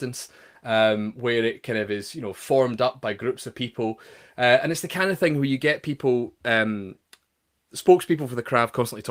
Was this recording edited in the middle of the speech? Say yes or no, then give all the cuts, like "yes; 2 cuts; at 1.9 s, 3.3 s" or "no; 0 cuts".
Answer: no; 0 cuts